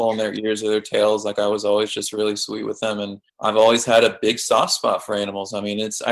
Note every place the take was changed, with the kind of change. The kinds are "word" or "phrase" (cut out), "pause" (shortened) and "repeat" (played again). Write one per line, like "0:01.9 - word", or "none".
0:03.3 - pause